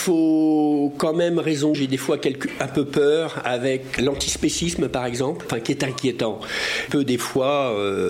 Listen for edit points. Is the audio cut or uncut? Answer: cut